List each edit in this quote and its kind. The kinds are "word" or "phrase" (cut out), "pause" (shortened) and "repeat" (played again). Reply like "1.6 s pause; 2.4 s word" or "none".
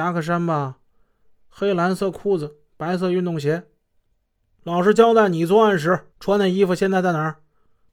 6.1 s pause